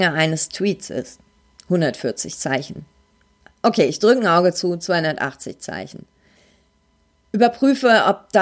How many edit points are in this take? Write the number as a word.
zero